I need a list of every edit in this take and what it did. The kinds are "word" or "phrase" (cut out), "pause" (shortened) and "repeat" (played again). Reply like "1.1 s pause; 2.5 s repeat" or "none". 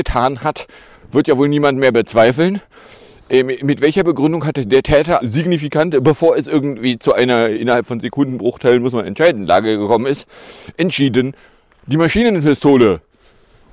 5.2 s word